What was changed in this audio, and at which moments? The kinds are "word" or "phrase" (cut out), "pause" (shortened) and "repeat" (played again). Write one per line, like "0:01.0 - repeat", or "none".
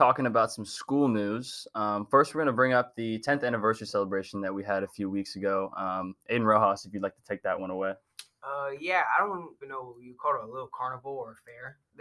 0:09.6 - word